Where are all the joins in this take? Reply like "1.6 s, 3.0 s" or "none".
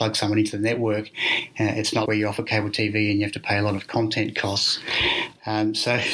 2.1 s